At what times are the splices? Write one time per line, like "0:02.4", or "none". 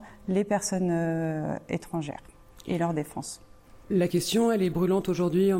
none